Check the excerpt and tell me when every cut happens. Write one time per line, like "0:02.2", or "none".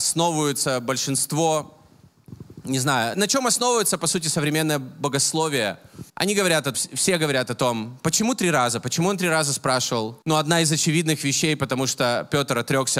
0:03.1
0:06.1
0:06.7
0:10.2